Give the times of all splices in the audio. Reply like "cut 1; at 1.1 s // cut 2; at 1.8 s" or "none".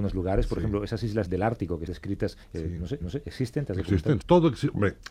cut 1; at 1.3 s // cut 2; at 1.9 s // cut 3; at 2.4 s // cut 4; at 3.0 s // cut 5; at 4.2 s